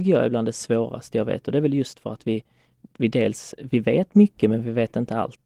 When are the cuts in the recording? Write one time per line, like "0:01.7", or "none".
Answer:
none

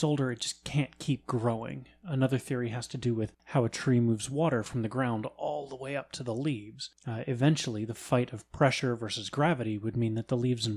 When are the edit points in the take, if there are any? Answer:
0:03.4
0:07.0

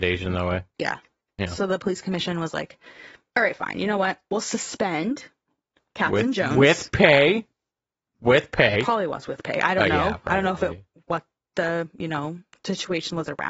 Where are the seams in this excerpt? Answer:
none

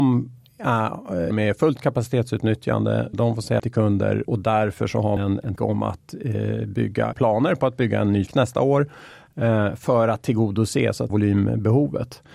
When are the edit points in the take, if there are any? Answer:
0:01.3
0:03.1
0:03.6
0:04.2
0:05.2
0:05.6
0:07.1
0:08.3
0:11.1

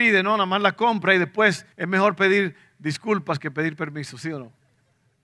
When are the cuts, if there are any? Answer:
0:01.7

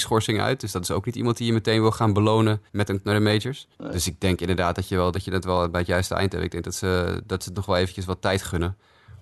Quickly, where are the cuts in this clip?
0:02.7
0:03.0
0:03.7
0:05.1
0:07.5

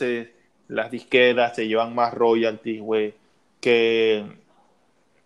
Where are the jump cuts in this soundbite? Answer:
none

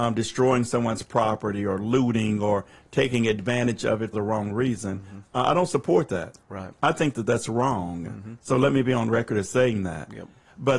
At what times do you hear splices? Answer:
0:04.1

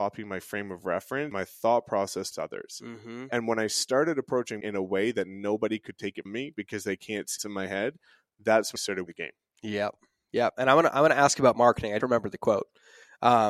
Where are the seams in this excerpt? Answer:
0:01.3
0:02.3
0:04.6
0:06.3
0:07.4
0:08.8
0:09.1
0:12.0

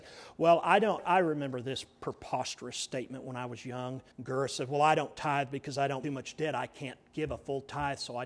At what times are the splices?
0:01.0
0:04.1
0:06.0

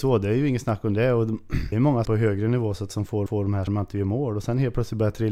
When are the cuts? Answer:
0:01.7
0:02.0
0:02.9
0:03.3
0:03.7

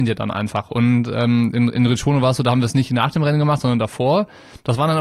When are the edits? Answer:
none

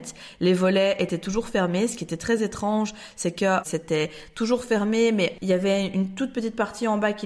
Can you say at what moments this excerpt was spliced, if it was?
none

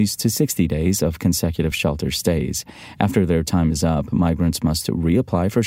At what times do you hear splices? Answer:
none

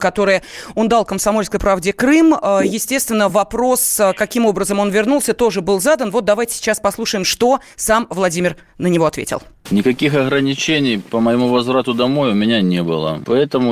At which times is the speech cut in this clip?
none

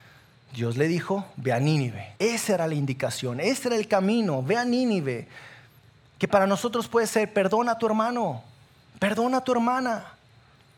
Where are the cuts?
0:02.2

